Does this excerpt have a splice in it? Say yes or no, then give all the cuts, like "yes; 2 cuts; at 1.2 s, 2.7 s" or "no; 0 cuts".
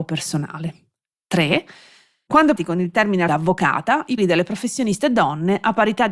yes; 3 cuts; at 2.6 s, 3.3 s, 4.2 s